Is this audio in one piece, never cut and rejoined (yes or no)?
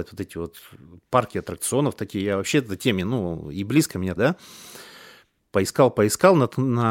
no